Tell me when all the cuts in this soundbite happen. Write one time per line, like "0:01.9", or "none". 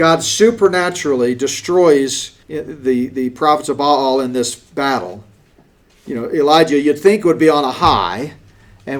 0:02.4